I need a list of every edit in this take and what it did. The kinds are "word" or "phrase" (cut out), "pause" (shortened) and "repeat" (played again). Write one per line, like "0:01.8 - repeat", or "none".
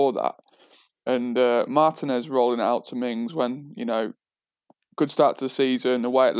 none